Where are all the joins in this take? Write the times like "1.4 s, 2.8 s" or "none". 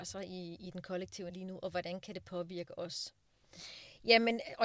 1.3 s